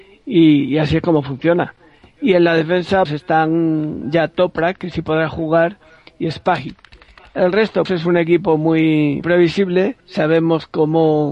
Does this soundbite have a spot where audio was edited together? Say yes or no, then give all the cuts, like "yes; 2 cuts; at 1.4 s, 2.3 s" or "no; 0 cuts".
yes; 4 cuts; at 3.1 s, 7.9 s, 9.2 s, 10.0 s